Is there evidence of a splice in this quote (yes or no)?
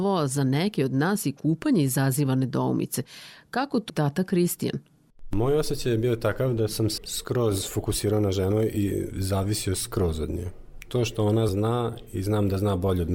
yes